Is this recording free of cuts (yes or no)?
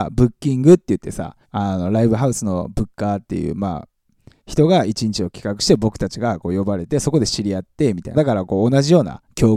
no